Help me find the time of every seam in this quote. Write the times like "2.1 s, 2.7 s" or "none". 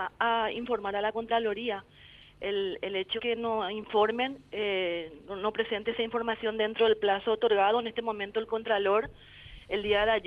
3.2 s

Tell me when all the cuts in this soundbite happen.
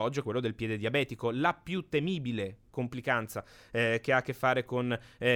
none

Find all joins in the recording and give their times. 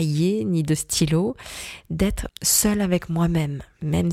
2.3 s

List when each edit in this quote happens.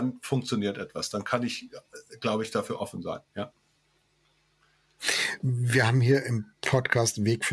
none

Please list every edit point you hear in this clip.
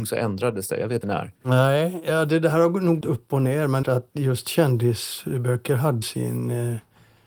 1.0 s, 1.4 s, 3.0 s, 3.8 s, 6.0 s

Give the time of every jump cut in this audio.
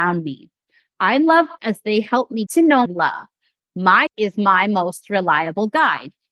1.6 s, 2.5 s, 2.9 s, 4.1 s

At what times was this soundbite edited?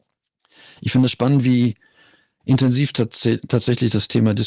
none

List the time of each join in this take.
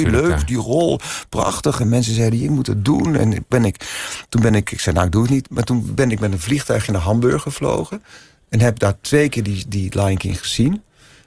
none

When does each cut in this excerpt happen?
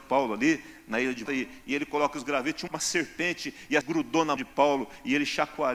1.3 s, 2.7 s, 3.8 s, 4.4 s

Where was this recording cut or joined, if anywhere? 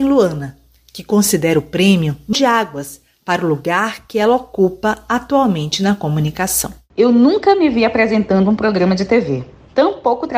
2.3 s

